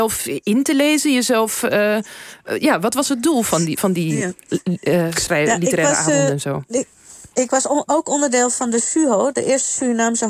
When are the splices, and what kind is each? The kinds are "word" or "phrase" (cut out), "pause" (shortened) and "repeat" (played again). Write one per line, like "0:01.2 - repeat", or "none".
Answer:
0:07.3 - pause